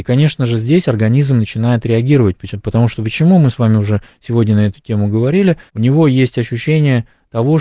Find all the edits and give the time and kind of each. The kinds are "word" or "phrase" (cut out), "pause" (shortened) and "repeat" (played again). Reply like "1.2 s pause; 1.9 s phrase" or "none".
5.7 s pause